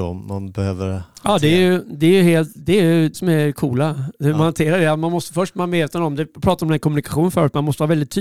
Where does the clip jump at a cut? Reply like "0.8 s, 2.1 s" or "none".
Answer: 3.1 s